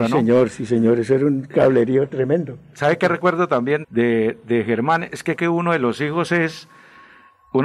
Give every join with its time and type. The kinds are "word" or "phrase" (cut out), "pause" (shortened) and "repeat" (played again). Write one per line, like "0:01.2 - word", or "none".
0:03.8 - word
0:05.4 - word